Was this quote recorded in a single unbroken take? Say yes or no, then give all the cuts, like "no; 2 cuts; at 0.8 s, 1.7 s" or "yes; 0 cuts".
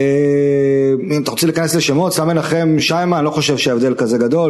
yes; 0 cuts